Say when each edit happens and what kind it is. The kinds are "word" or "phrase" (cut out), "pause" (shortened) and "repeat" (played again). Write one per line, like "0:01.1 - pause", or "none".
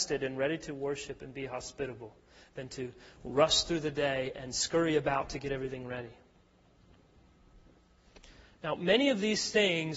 none